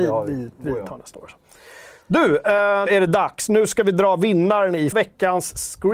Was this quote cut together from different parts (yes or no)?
yes